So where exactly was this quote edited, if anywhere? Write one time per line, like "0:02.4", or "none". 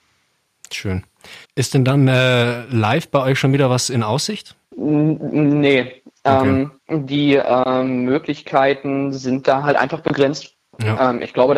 0:01.4
0:04.6
0:06.8